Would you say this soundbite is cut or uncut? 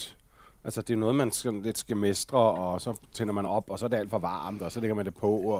uncut